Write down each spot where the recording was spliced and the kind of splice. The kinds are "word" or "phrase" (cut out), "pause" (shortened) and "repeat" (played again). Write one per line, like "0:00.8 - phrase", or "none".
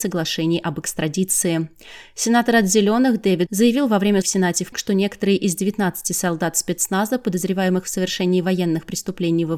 0:03.5 - word
0:04.2 - word
0:04.7 - word